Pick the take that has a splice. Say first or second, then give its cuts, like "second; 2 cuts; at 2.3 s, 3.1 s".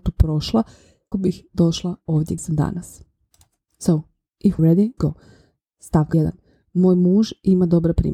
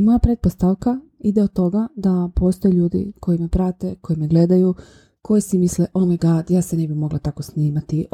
first; 5 cuts; at 1.1 s, 2.4 s, 4.6 s, 5.0 s, 6.1 s